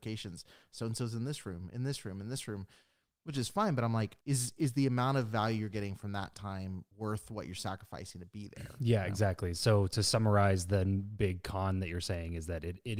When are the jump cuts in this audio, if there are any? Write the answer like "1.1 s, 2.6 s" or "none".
4.2 s, 6.9 s